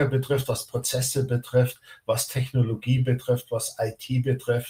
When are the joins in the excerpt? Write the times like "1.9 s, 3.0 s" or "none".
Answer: none

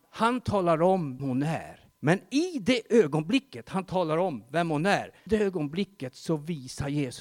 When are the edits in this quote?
1.2 s, 2.0 s, 5.3 s

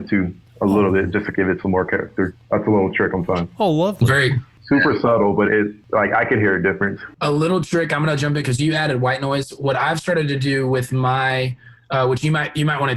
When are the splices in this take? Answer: 1.3 s, 3.1 s, 5.5 s

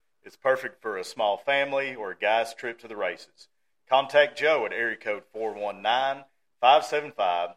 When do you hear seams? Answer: none

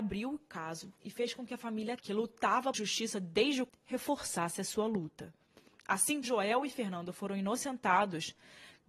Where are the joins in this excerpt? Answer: 2.0 s, 2.7 s, 3.7 s, 6.2 s

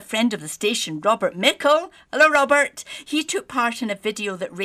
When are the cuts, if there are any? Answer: none

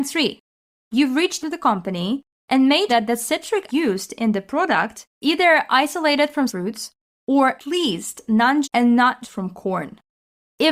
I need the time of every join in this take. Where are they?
1.4 s, 2.9 s, 3.7 s, 5.1 s, 6.5 s, 7.6 s, 8.6 s, 9.2 s

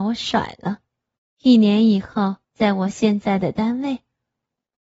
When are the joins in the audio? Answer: 1.2 s, 2.4 s

